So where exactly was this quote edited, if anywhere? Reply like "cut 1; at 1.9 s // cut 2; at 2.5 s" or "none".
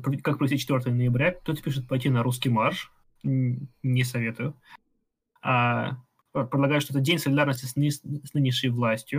none